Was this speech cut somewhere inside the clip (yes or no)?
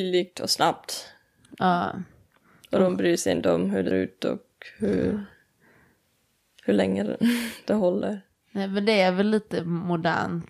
yes